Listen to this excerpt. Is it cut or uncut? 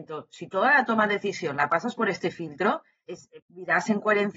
uncut